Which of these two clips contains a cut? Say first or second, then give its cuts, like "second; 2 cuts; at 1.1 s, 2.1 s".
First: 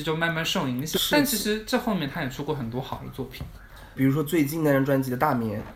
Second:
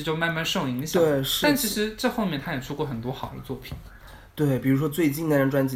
first; 2 cuts; at 0.9 s, 4.0 s